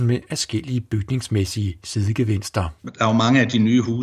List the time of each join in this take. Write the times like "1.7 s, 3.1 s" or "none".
2.8 s